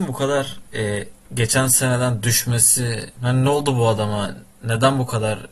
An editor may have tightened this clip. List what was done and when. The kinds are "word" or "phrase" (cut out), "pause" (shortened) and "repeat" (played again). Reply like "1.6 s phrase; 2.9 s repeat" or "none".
3.1 s pause